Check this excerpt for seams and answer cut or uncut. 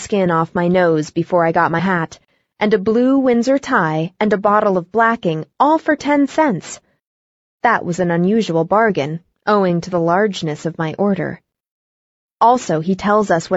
cut